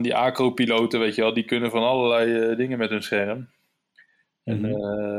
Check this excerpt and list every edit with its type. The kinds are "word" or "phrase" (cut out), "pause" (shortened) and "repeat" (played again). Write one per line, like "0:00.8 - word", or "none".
none